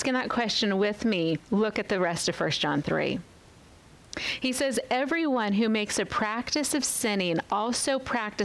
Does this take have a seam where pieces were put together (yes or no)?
yes